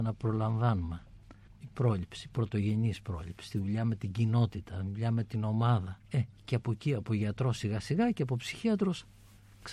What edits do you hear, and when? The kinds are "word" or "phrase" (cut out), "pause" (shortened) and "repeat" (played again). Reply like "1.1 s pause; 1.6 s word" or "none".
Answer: 1.5 s pause; 6.0 s pause